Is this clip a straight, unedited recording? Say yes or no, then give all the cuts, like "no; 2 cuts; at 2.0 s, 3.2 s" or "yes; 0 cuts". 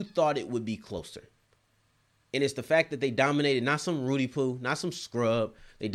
yes; 0 cuts